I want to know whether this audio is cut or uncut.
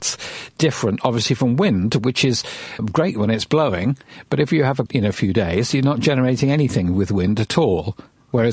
cut